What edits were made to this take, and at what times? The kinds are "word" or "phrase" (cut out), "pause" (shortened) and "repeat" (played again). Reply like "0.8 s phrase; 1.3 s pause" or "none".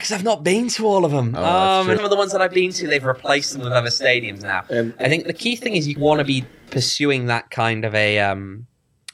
2.0 s phrase; 6.0 s phrase